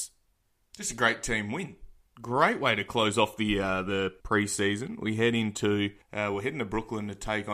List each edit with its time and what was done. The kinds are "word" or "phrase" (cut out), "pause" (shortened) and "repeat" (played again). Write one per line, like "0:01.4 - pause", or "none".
0:02.1 - pause
0:04.2 - pause
0:06.0 - pause